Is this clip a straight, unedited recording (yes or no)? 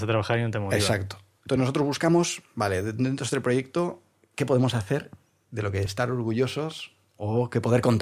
yes